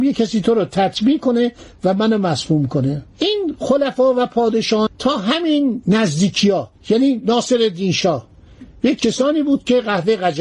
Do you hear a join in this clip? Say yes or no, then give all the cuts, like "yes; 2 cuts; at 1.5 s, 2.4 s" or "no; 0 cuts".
yes; 2 cuts; at 4.9 s, 9.0 s